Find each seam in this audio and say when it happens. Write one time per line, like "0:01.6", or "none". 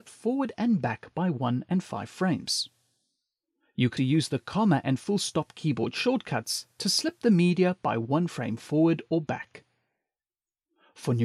0:04.0

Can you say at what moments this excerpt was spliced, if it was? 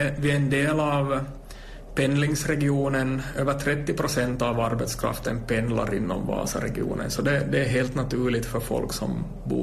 none

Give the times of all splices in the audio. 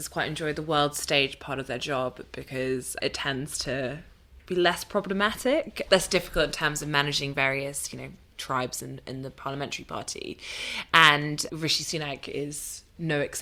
none

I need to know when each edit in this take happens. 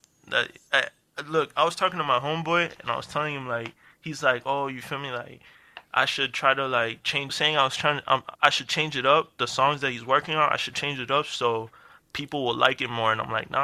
0:07.3
0:08.3

